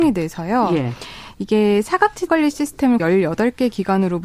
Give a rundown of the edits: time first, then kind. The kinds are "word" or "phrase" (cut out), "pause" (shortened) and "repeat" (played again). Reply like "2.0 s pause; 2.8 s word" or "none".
2.3 s word; 3.0 s word